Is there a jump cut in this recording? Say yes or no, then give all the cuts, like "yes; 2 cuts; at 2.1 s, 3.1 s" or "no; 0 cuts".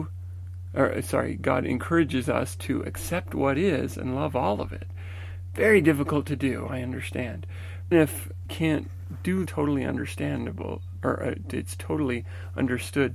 yes; 3 cuts; at 7.9 s, 8.5 s, 9.5 s